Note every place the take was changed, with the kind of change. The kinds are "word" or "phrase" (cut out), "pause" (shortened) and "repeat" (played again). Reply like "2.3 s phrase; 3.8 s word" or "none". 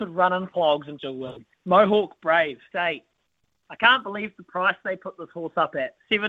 1.0 s word; 1.5 s pause; 2.7 s word